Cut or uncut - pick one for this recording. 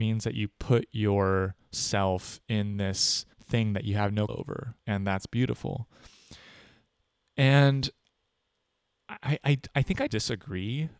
cut